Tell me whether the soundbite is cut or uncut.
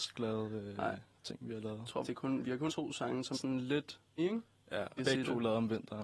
cut